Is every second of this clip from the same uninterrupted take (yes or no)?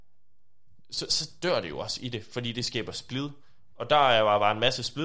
no